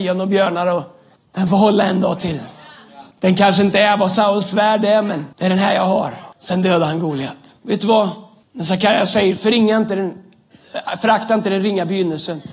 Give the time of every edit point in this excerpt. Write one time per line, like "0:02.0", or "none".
0:01.2
0:03.1
0:05.3
0:06.3
0:07.6
0:08.4